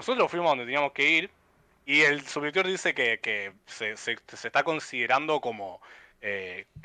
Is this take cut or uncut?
uncut